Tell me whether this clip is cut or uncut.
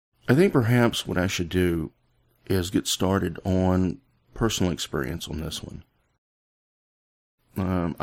uncut